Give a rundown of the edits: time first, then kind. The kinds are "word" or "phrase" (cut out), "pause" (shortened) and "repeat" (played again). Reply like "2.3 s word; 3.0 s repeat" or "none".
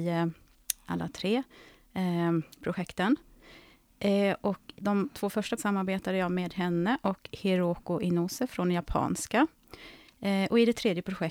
2.5 s pause; 4.7 s word; 5.6 s word